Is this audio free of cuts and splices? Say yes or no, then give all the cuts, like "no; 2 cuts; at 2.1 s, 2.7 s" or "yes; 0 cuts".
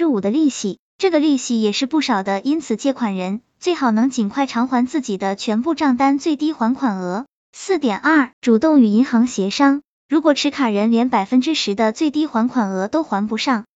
no; 1 cut; at 8.3 s